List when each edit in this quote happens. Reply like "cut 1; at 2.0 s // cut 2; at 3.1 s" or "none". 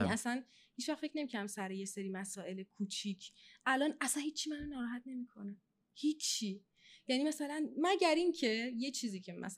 none